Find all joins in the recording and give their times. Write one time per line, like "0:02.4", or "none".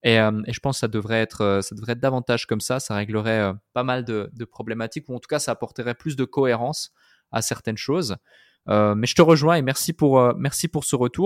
none